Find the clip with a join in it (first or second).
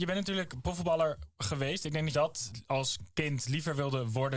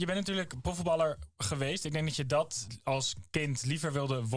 first